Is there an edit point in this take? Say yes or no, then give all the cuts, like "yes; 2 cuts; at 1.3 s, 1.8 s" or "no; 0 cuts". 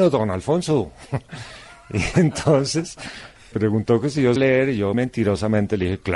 yes; 3 cuts; at 3.5 s, 4.4 s, 4.9 s